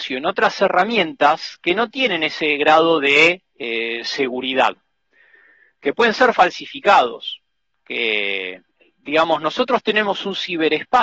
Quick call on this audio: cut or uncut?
uncut